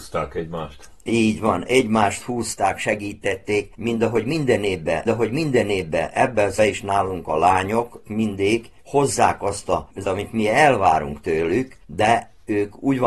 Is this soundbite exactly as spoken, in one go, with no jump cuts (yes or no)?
no